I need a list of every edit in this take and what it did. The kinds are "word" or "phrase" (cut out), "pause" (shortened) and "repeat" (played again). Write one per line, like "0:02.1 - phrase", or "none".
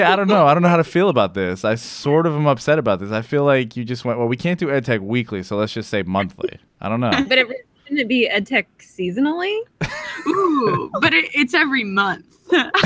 0:06.7 - pause